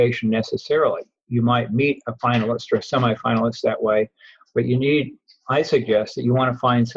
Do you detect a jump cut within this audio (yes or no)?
no